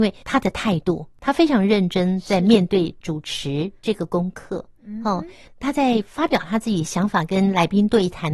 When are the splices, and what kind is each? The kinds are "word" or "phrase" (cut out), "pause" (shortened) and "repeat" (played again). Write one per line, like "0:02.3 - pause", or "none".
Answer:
none